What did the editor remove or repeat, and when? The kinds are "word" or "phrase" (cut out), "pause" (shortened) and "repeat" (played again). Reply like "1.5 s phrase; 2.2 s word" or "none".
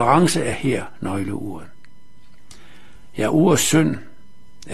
none